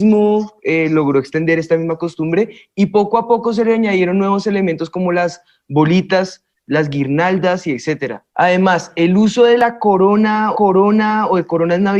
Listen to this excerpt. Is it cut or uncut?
cut